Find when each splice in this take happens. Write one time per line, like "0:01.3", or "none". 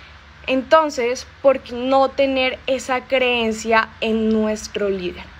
0:01.7